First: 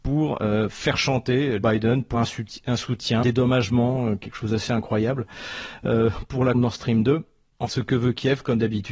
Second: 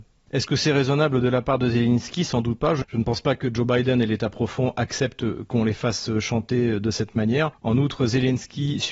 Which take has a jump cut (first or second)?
first